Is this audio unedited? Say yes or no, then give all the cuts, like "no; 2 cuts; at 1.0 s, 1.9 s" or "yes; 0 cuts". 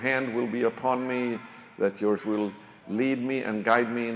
no; 1 cut; at 2.2 s